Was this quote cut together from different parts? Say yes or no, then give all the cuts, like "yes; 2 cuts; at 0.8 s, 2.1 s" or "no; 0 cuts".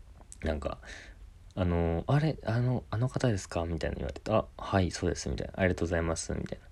no; 0 cuts